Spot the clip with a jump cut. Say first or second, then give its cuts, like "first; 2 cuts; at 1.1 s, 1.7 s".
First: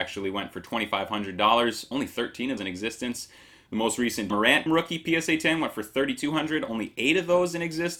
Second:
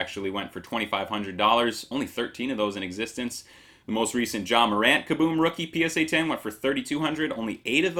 first; 3 cuts; at 2.6 s, 4.3 s, 4.7 s